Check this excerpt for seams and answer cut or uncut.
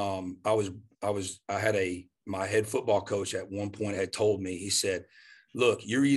uncut